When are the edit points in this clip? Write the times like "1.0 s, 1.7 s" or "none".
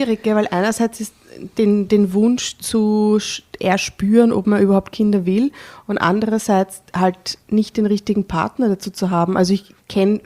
7.4 s